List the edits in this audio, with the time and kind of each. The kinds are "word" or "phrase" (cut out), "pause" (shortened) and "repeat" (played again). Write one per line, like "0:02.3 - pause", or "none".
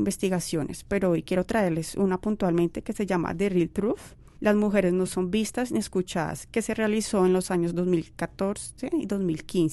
none